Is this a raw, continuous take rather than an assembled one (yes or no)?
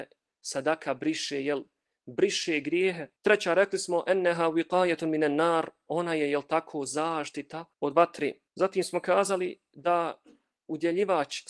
no